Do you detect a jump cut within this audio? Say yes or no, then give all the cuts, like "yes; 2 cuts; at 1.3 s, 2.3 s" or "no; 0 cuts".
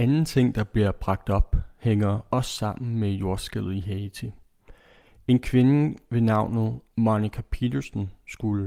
no; 0 cuts